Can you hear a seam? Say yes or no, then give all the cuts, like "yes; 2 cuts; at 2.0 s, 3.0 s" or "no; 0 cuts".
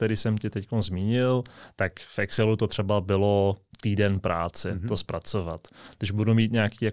no; 0 cuts